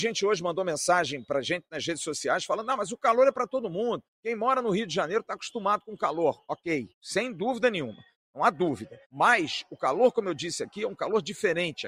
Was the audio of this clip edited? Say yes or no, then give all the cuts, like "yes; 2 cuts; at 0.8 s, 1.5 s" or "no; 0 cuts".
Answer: yes; 3 cuts; at 4.1 s, 6.9 s, 9.0 s